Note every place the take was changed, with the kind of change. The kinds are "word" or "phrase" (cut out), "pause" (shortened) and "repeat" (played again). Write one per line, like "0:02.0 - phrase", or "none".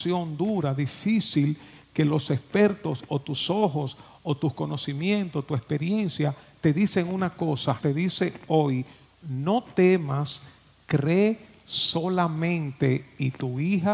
0:07.8 - word